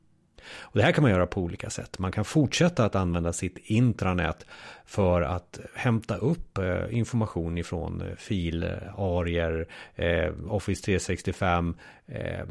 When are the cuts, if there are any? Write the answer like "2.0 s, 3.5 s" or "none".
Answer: none